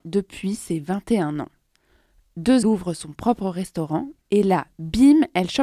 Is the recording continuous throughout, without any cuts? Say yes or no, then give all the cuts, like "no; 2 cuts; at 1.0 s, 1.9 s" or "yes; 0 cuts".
no; 2 cuts; at 2.6 s, 4.2 s